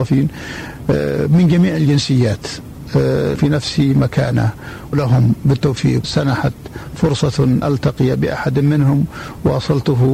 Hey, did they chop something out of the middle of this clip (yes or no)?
yes